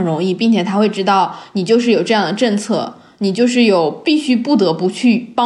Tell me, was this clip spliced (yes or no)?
no